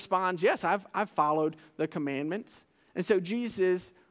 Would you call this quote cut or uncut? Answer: uncut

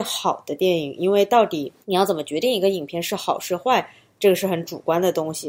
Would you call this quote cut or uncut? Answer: cut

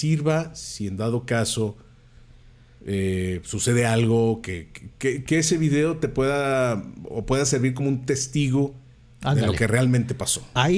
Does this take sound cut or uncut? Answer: uncut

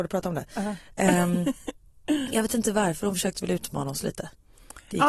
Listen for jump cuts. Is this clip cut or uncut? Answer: uncut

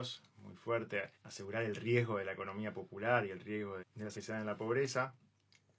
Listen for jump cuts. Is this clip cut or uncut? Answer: cut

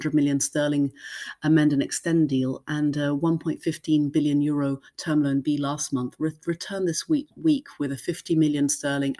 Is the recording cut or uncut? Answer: uncut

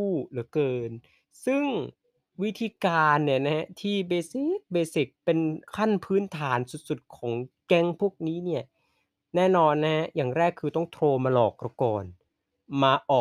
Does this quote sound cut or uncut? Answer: cut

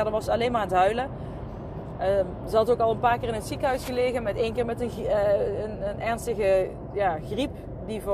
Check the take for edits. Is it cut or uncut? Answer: uncut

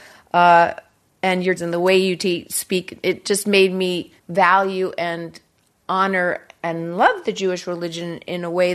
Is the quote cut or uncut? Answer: cut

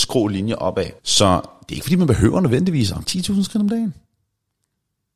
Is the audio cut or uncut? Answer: cut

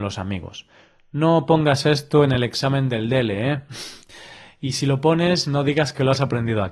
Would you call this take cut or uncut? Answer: uncut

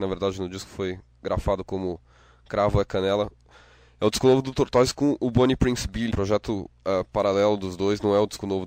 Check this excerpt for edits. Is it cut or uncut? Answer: cut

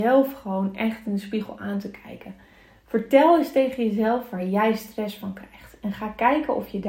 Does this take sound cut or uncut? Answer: uncut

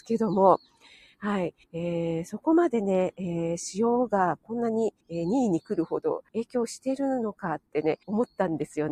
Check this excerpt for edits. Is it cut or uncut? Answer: cut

